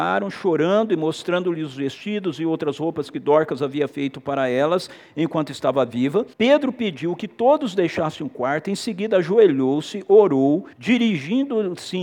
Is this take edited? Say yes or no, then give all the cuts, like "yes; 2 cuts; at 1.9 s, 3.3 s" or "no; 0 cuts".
yes; 2 cuts; at 6.3 s, 10.7 s